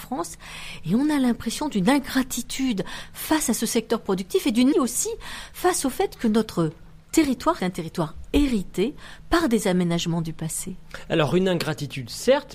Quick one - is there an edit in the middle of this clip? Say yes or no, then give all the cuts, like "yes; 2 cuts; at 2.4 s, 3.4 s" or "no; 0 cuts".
yes; 2 cuts; at 4.7 s, 7.6 s